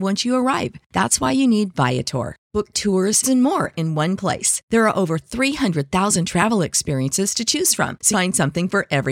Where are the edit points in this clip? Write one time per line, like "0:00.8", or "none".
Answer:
0:02.7
0:03.2
0:08.1